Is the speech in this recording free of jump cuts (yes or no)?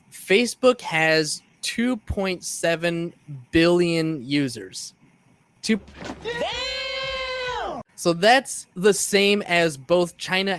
no